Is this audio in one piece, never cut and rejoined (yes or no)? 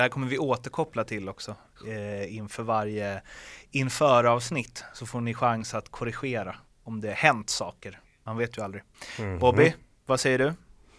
yes